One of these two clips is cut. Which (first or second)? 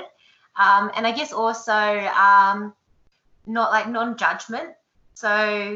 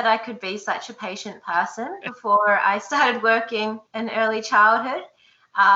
second